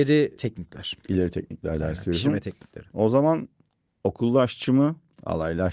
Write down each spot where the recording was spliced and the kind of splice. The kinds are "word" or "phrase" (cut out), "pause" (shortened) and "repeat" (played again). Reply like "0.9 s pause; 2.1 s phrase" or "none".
none